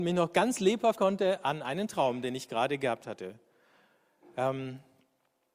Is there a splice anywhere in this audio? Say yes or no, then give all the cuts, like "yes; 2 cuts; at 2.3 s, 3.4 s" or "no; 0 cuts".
yes; 1 cut; at 1.0 s